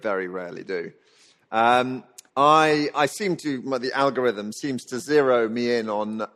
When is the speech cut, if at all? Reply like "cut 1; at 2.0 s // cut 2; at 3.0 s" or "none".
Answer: cut 1; at 2.3 s